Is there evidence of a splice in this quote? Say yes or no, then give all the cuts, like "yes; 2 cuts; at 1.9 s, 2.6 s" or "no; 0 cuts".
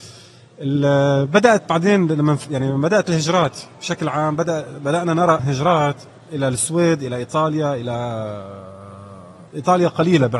yes; 2 cuts; at 5.4 s, 9.5 s